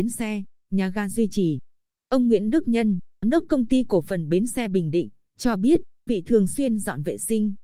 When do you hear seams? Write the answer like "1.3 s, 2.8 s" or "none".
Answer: 3.2 s, 6.1 s